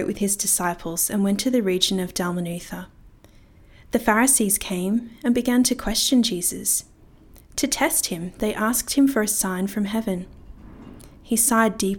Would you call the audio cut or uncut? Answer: uncut